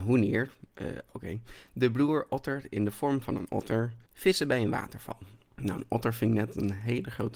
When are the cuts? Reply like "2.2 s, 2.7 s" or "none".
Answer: 4.1 s, 5.5 s